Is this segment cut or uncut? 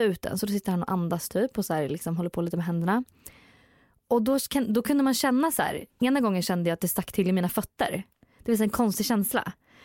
uncut